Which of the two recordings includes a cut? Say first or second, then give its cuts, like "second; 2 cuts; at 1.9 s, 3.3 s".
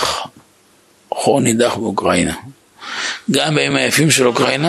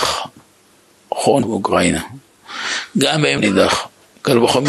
second; 2 cuts; at 1.4 s, 3.4 s